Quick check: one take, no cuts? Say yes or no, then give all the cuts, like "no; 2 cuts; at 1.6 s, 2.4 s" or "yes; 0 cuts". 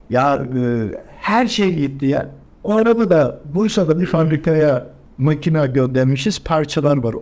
yes; 0 cuts